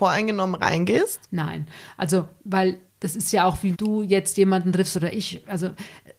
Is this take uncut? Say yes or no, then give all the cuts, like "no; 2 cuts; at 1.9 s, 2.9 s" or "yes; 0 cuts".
no; 2 cuts; at 2.9 s, 3.7 s